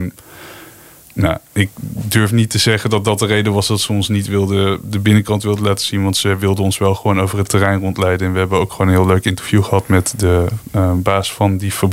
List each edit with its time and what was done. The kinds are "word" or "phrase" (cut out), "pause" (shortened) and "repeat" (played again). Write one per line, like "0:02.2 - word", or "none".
none